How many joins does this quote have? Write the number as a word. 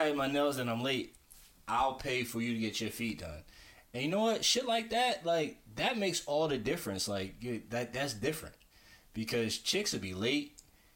zero